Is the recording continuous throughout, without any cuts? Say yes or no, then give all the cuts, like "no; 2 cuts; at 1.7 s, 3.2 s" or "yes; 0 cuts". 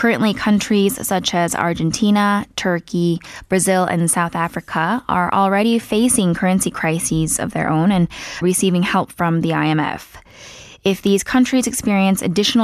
no; 1 cut; at 8.4 s